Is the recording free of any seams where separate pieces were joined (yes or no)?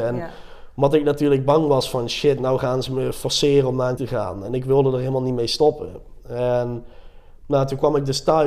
no